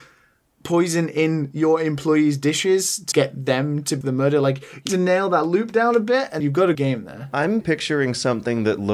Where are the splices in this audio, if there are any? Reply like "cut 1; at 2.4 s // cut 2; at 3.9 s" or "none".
cut 1; at 3.1 s // cut 2; at 4.0 s // cut 3; at 4.9 s // cut 4; at 6.4 s // cut 5; at 6.7 s // cut 6; at 7.6 s